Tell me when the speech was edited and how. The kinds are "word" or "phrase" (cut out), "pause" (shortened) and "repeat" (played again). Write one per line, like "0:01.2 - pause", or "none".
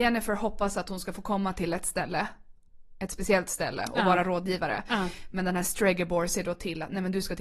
none